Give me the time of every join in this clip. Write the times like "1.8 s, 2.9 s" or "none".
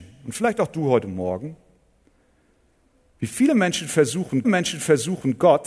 4.4 s